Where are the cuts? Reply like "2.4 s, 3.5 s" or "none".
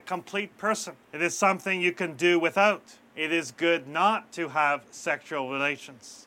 1.0 s, 3.1 s